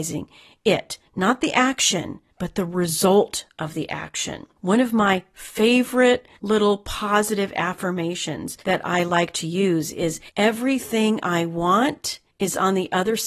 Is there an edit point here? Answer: yes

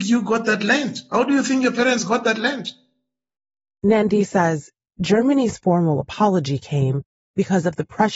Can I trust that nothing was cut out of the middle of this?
yes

